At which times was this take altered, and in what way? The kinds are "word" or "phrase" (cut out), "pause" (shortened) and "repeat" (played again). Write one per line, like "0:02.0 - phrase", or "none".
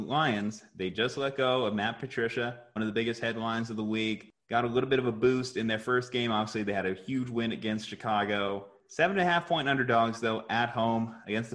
0:02.8 - word